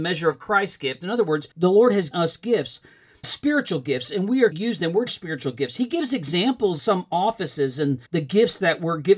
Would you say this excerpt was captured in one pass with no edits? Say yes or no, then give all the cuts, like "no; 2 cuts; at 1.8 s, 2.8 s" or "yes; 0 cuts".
no; 7 cuts; at 1.5 s, 2.1 s, 3.2 s, 4.5 s, 5.1 s, 6.8 s, 8.1 s